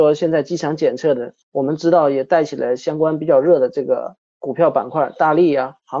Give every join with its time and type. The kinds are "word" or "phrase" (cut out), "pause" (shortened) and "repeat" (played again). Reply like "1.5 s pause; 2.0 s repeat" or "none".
1.4 s pause